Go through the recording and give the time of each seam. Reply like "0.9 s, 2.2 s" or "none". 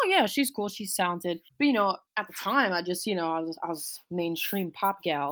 1.5 s, 2.1 s